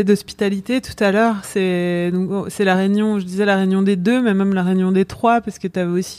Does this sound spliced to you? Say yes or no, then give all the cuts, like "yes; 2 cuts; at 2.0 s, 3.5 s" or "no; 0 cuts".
no; 0 cuts